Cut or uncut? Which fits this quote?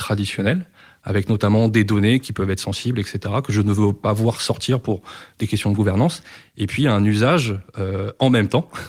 uncut